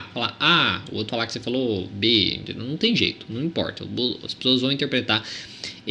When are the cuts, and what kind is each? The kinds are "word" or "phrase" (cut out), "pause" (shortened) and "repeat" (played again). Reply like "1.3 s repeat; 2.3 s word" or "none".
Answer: 1.1 s word